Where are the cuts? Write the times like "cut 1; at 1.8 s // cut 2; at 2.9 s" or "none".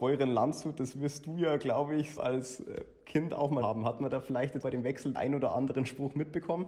cut 1; at 2.2 s // cut 2; at 3.6 s // cut 3; at 4.6 s // cut 4; at 5.1 s